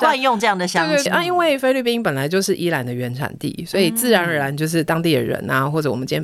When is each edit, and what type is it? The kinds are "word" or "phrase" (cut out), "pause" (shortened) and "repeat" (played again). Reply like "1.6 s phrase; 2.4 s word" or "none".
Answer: 1.1 s phrase